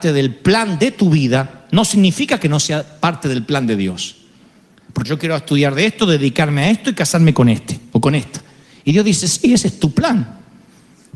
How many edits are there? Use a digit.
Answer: 1